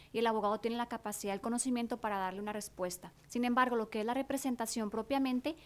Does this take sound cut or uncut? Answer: cut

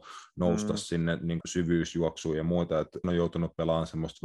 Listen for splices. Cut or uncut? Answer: cut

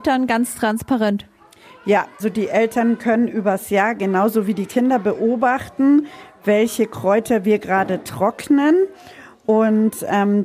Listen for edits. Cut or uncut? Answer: cut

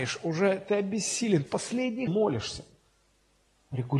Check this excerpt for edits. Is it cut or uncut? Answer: cut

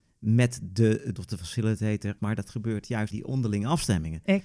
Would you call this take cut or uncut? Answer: cut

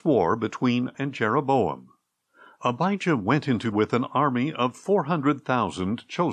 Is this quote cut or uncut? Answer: cut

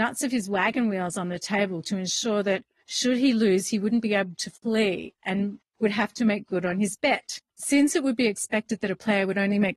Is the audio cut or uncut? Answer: cut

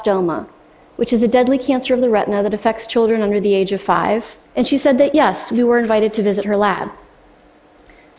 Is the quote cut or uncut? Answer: cut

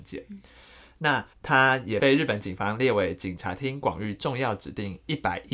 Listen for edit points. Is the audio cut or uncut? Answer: cut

